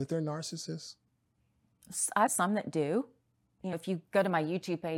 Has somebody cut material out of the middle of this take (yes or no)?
yes